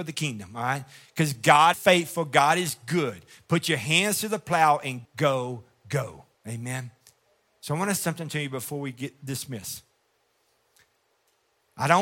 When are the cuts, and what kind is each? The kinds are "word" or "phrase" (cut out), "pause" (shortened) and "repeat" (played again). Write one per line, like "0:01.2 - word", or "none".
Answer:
0:01.7 - word
0:05.1 - word
0:06.3 - pause
0:08.0 - word